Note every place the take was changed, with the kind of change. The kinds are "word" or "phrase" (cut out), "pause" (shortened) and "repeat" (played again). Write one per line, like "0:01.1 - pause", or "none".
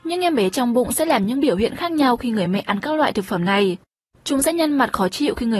none

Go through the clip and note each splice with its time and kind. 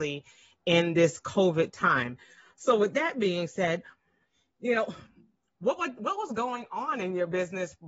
none

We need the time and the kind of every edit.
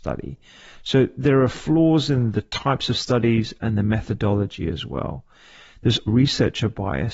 0:06.1 - word

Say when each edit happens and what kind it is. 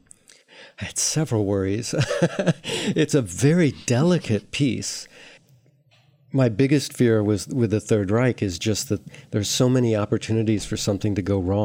none

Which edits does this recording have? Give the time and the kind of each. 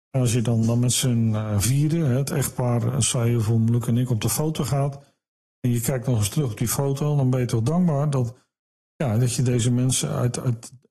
none

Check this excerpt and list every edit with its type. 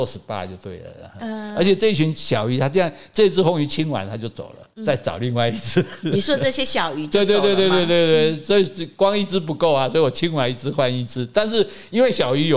0:04.7 - pause

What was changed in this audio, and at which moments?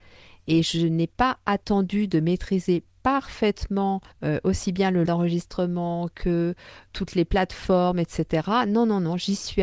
0:04.1 - pause
0:05.1 - word
0:06.9 - word

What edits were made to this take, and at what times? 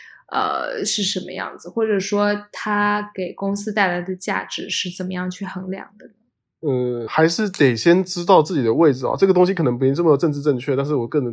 0:07.1 - word

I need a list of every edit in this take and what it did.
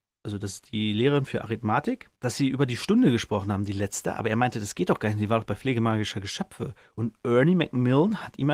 0:02.2 - pause

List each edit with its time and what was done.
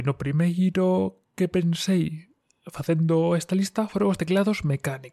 none

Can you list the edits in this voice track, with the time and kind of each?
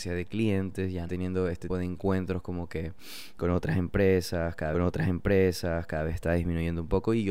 0:01.1 - phrase
0:01.7 - word
0:03.4 - word
0:04.7 - repeat

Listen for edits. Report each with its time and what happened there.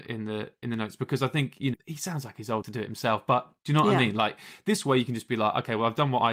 0:01.7 - word
0:02.6 - word

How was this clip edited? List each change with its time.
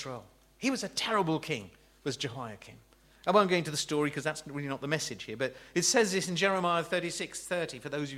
none

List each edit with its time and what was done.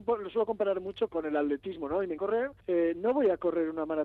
0:01.1 - word
0:02.2 - word
0:02.6 - pause

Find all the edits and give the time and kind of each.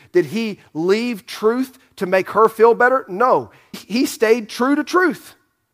0:03.7 - word

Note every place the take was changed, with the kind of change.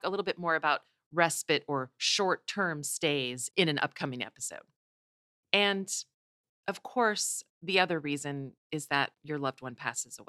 none

